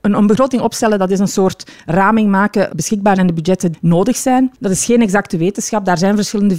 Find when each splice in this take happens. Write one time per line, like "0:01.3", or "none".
0:02.7
0:03.2
0:03.7
0:04.5